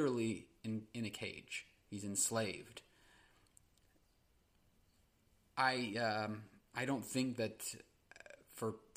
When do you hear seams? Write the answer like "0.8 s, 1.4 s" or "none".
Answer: none